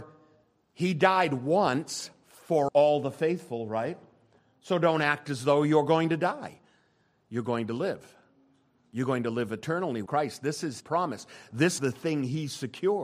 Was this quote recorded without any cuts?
no; 4 cuts; at 2.7 s, 10.1 s, 10.8 s, 11.8 s

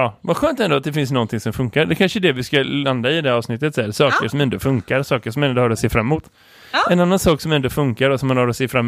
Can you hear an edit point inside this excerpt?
no; 0 cuts

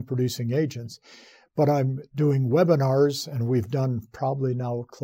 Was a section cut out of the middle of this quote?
no; 0 cuts

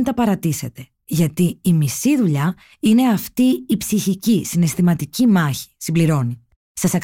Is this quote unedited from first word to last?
yes; 0 cuts

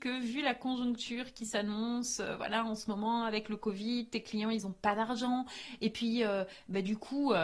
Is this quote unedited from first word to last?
yes; 0 cuts

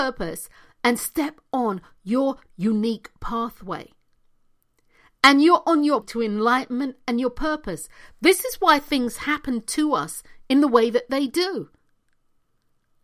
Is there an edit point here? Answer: yes; 2 cuts; at 2.5 s, 6.0 s

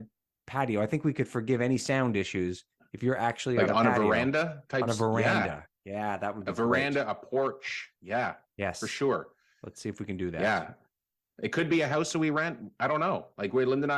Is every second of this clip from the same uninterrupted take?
yes; 0 cuts

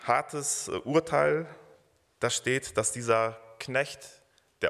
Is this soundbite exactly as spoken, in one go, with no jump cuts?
yes; 0 cuts

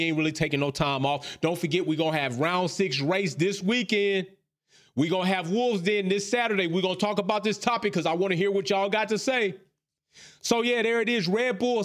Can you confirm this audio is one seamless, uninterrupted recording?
yes; 0 cuts

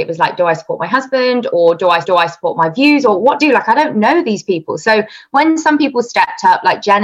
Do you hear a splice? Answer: yes; 2 cuts; at 2.0 s, 3.4 s

